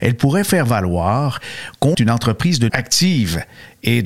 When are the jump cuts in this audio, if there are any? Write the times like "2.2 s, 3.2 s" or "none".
1.9 s, 2.7 s